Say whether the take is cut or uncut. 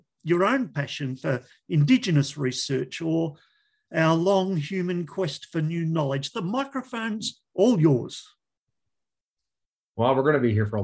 uncut